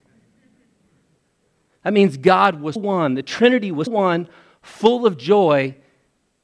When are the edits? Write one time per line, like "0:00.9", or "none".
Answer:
0:02.8
0:03.9